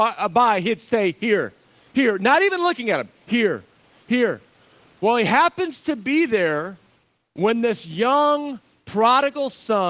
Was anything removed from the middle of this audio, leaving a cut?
no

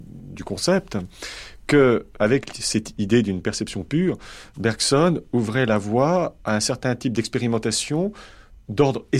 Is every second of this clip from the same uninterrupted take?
yes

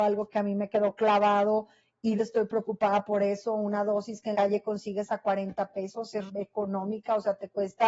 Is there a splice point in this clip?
yes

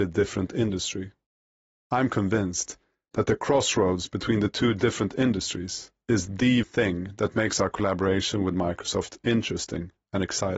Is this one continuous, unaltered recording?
no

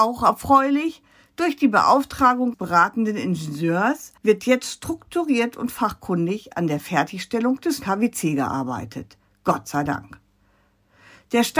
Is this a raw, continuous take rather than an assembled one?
no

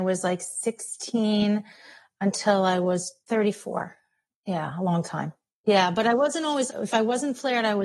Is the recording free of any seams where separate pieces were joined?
no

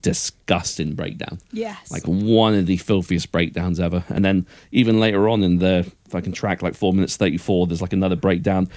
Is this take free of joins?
yes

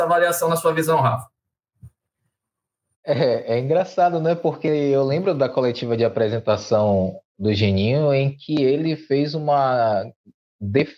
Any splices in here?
no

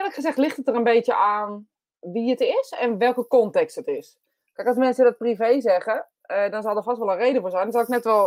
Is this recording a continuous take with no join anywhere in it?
yes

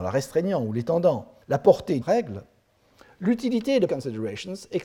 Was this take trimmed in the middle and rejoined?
yes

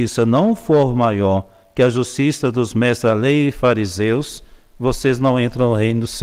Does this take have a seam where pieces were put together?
no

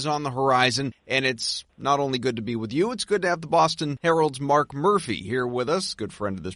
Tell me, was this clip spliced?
no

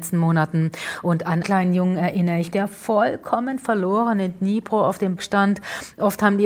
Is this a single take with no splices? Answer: no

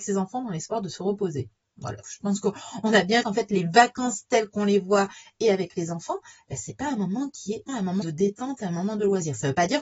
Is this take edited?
yes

